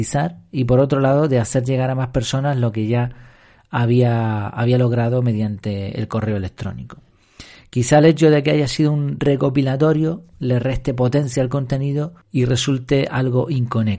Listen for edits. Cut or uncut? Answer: cut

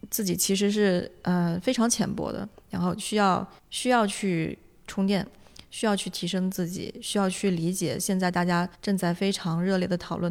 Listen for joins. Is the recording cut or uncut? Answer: cut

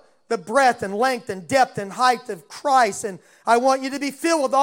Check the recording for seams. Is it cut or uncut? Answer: uncut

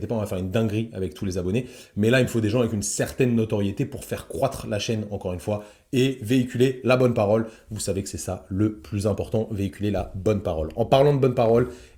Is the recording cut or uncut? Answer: uncut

